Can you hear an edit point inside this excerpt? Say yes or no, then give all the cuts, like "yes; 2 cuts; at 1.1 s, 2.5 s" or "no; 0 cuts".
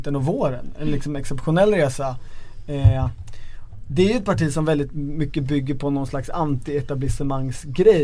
no; 0 cuts